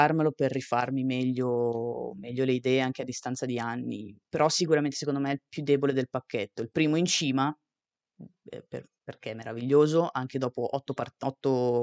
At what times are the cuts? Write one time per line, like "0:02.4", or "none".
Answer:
none

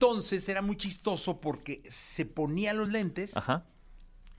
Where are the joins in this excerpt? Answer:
none

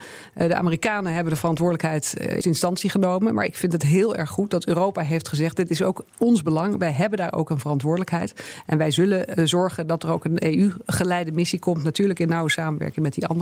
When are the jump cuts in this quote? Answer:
0:02.4

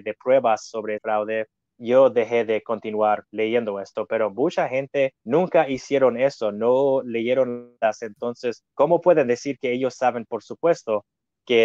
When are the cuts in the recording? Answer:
0:01.0
0:01.7
0:03.3
0:05.2
0:07.8
0:08.7

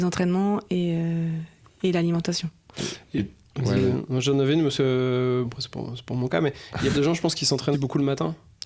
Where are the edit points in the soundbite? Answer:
0:05.4
0:06.9
0:07.7

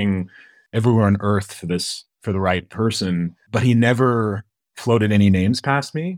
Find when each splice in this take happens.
none

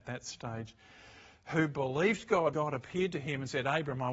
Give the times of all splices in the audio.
0:02.5

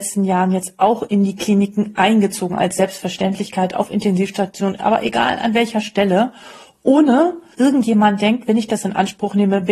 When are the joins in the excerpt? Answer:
0:07.5

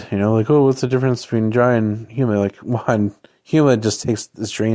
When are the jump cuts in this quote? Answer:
none

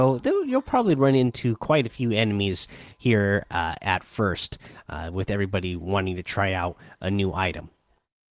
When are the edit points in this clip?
none

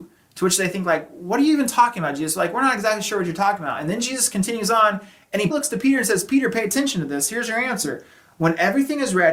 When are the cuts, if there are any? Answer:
0:05.5

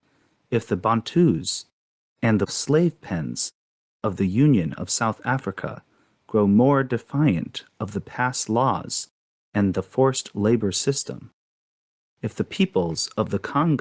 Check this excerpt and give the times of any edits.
none

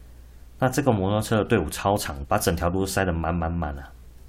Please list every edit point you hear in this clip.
0:02.2

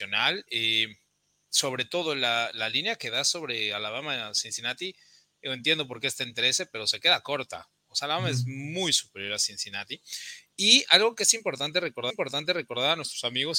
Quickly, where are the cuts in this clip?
0:12.1

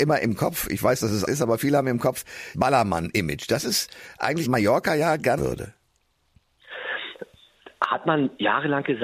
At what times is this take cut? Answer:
0:01.3
0:02.5
0:04.4
0:05.4

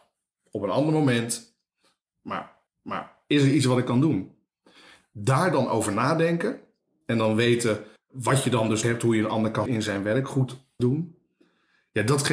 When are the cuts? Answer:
0:02.7
0:08.0
0:08.8
0:09.7
0:10.8

